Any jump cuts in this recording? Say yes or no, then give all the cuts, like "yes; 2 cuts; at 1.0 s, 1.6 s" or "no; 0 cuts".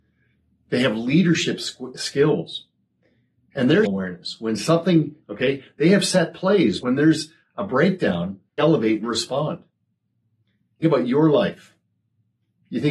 yes; 6 cuts; at 3.8 s, 5.2 s, 6.8 s, 8.6 s, 9.0 s, 10.8 s